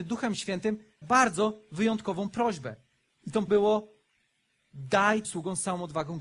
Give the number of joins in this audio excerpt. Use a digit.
3